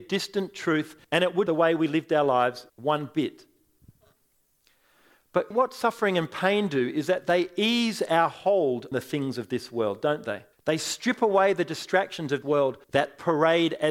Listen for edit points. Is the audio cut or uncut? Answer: cut